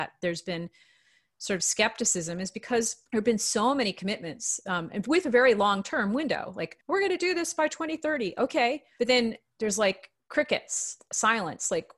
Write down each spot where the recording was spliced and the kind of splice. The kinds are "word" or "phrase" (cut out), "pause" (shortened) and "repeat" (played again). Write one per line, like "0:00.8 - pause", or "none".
0:03.1 - pause
0:06.8 - pause